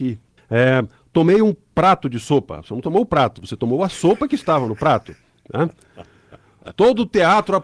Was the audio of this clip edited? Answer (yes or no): no